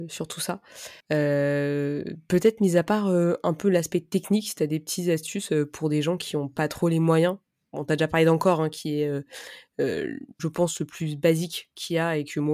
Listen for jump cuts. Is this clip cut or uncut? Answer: cut